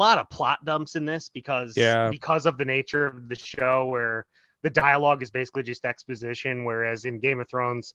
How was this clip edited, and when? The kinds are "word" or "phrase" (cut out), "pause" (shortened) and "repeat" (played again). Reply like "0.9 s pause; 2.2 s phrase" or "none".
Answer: none